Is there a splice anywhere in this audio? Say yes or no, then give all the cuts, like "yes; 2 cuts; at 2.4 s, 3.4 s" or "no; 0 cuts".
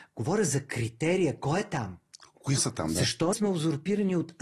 yes; 2 cuts; at 2.6 s, 3.3 s